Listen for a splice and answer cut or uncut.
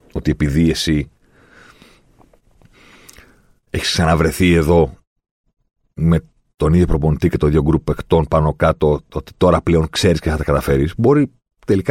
uncut